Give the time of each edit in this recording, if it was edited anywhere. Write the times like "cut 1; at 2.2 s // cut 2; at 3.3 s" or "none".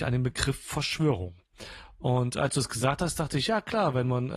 none